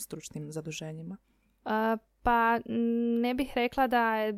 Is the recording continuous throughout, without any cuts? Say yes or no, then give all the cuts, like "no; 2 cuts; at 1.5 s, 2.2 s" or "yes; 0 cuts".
yes; 0 cuts